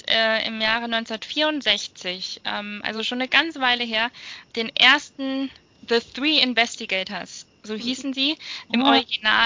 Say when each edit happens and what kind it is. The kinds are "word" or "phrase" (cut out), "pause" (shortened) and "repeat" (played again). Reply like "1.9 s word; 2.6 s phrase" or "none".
none